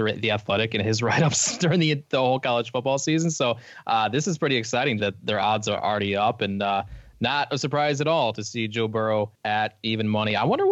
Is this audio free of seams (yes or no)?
no